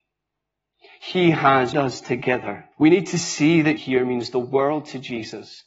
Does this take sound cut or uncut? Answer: cut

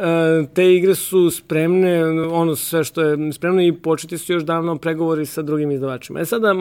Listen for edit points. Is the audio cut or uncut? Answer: uncut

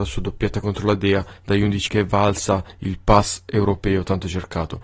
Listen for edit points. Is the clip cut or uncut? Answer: cut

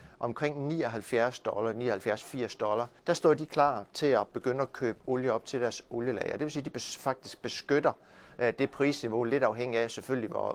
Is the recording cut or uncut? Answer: cut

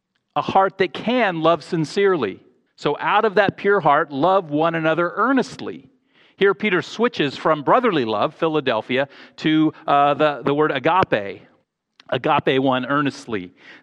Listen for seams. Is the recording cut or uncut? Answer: cut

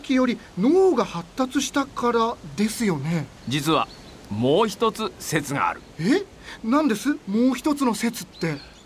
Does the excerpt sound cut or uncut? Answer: cut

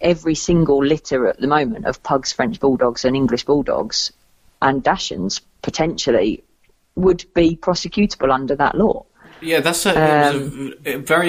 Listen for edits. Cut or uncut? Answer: uncut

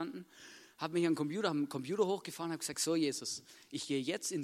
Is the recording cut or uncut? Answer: uncut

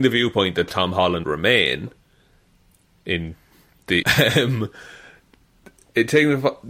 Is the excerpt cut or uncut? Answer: cut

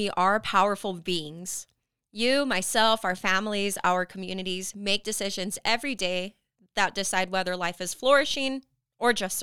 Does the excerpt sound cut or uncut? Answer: uncut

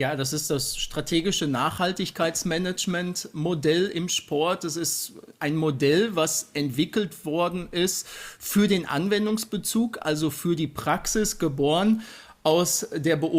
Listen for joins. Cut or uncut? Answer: uncut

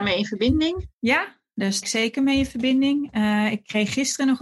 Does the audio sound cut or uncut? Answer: cut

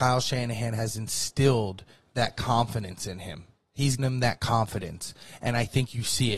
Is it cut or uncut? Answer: cut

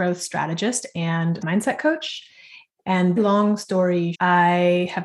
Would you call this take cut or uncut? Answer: cut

